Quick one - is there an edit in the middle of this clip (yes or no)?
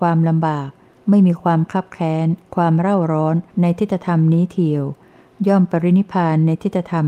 yes